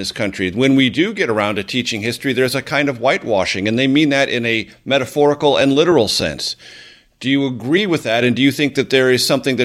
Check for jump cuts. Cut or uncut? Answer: uncut